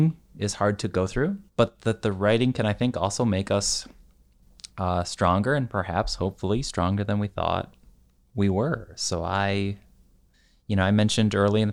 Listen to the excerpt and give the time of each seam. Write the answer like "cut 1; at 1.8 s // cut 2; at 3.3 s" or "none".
cut 1; at 1.5 s